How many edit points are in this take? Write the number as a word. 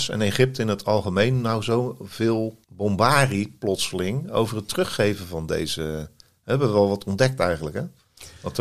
one